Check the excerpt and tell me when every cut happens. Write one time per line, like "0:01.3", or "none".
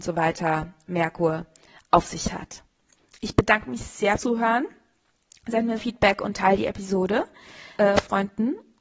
0:04.2
0:05.8
0:07.8